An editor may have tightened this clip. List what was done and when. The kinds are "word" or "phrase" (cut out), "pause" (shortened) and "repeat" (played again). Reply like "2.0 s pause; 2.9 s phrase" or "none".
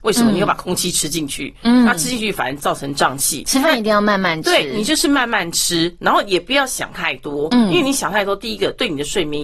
none